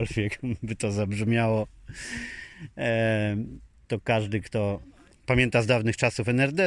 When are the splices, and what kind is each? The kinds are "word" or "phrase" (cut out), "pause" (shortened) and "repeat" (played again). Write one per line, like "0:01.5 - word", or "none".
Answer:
none